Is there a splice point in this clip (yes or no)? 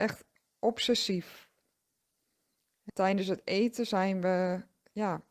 no